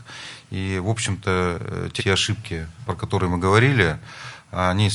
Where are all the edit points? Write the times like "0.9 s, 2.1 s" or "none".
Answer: 2.0 s, 2.8 s